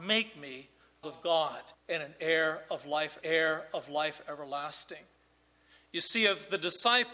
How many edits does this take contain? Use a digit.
3